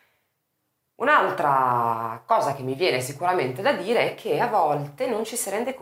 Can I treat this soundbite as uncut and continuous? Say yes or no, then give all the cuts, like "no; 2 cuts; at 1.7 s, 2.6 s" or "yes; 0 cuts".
yes; 0 cuts